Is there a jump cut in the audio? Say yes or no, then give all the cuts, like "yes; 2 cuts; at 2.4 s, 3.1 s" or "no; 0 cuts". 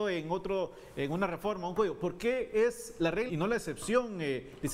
yes; 1 cut; at 3.3 s